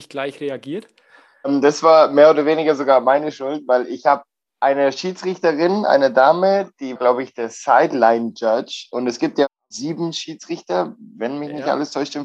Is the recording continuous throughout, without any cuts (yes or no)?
no